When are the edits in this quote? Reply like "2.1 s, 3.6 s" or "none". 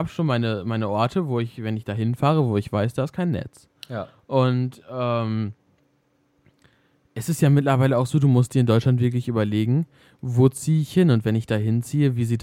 none

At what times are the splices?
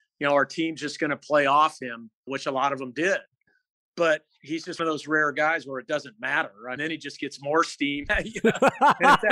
2.3 s, 4.8 s, 6.8 s, 8.1 s

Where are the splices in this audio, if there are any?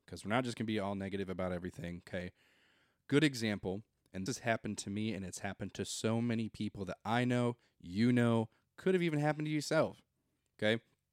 4.3 s

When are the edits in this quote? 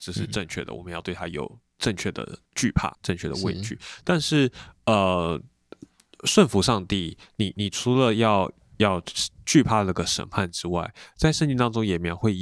2.5 s, 2.9 s

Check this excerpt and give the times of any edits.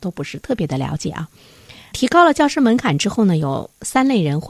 none

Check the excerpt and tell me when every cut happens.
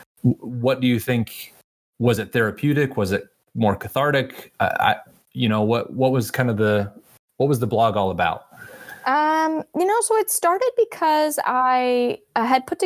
none

